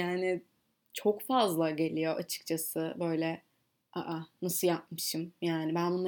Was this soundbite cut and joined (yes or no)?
no